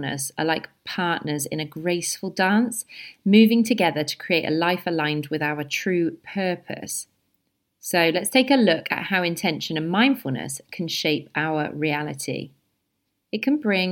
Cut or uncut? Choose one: uncut